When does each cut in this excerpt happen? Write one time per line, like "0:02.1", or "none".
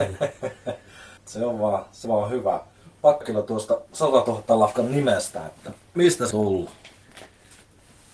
0:01.2
0:02.0
0:03.2
0:05.9
0:06.3

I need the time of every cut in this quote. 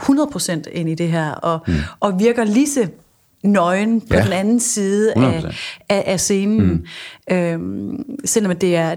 none

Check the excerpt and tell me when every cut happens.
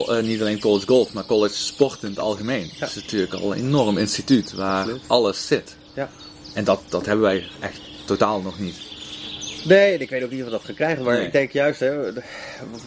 none

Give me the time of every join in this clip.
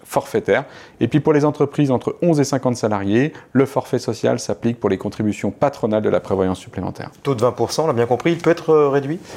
none

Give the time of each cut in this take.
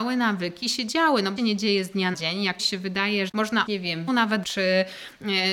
0:01.4
0:02.1
0:02.6
0:03.3
0:03.7
0:04.1
0:04.4

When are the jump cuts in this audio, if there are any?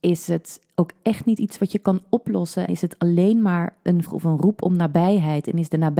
0:02.7
0:04.0

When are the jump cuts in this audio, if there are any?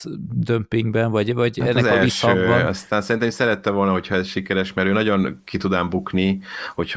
none

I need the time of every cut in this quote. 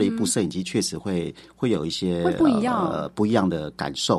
none

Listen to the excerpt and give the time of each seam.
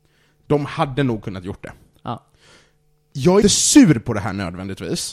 0:03.4

